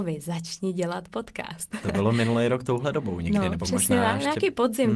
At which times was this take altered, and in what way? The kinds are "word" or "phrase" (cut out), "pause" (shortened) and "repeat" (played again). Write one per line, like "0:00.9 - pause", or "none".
none